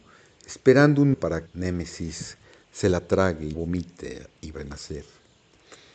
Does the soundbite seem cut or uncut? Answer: cut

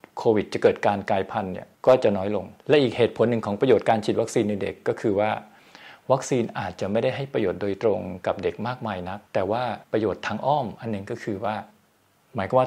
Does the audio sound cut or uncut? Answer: cut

